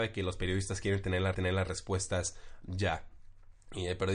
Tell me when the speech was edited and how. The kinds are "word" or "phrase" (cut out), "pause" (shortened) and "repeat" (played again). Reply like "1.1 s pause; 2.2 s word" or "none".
1.3 s repeat